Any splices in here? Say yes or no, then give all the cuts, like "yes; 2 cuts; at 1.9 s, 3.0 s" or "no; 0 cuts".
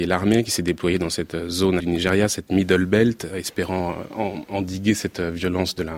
yes; 1 cut; at 1.8 s